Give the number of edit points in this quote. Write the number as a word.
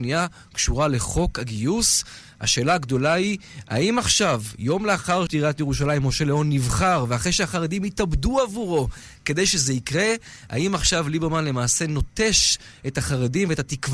one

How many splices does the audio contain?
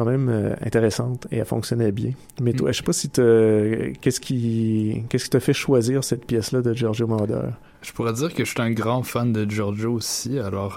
zero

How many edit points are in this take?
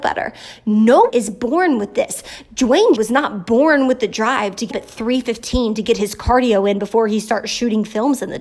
three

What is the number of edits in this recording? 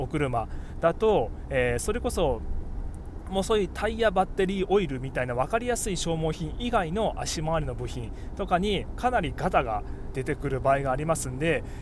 one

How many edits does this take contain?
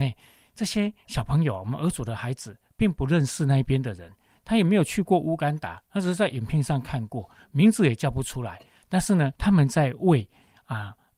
one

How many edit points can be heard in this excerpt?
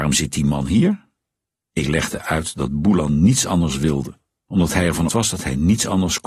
one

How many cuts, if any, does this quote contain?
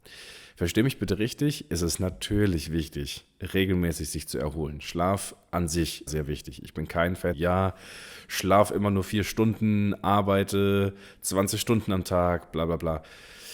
two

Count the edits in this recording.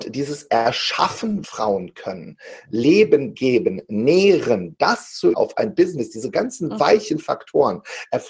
two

